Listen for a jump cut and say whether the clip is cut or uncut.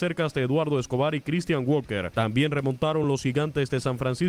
uncut